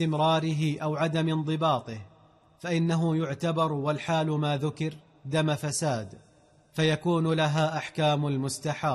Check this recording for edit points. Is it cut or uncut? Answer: uncut